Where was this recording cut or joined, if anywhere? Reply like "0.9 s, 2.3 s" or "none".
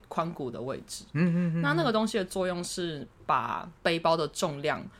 3.8 s